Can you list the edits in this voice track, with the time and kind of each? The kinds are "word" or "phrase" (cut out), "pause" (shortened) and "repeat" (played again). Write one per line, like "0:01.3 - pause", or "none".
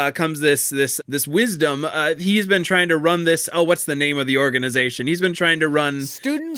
0:01.0 - word